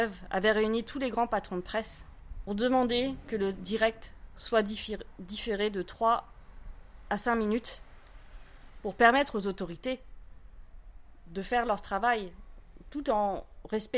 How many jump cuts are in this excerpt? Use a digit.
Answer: 1